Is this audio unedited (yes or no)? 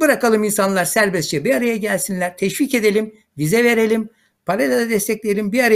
yes